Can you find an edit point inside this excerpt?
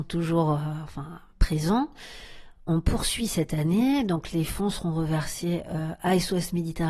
no; 0 cuts

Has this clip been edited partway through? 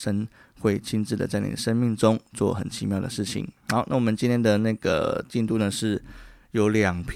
no; 0 cuts

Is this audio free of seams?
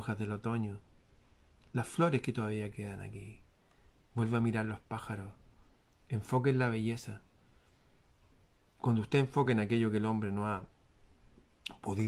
yes; 0 cuts

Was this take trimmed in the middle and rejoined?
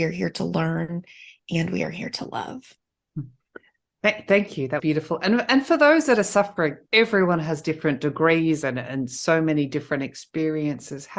yes; 1 cut; at 4.8 s

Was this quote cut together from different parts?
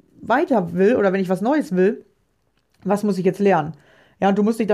no; 0 cuts

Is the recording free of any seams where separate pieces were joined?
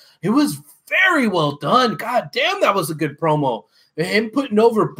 yes; 0 cuts

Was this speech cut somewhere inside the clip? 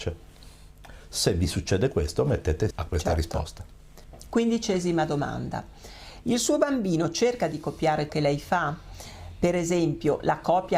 yes; 2 cuts; at 2.7 s, 8.1 s

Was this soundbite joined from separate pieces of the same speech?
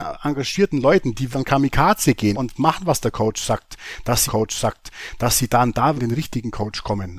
yes; 4 cuts; at 1.3 s, 2.3 s, 4.3 s, 6.0 s

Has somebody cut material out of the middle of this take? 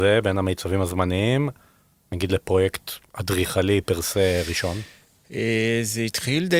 no; 0 cuts

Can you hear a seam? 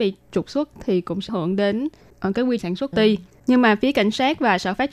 yes; 3 cuts; at 1.3 s, 2.6 s, 2.9 s

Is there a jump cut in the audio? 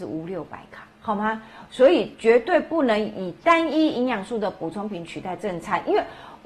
yes; 1 cut; at 0.9 s

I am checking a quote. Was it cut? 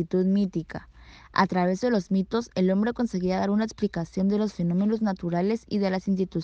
no; 0 cuts

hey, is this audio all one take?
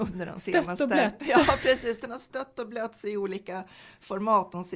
yes; 0 cuts

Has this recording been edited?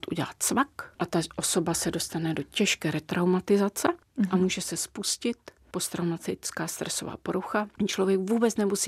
no; 0 cuts

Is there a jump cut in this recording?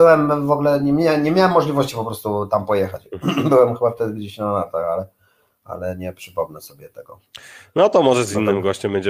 no; 0 cuts

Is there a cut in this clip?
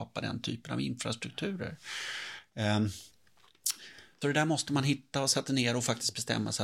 yes; 2 cuts; at 4.2 s, 5.5 s

